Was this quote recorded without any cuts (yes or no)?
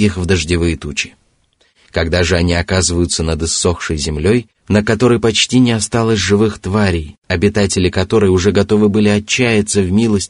yes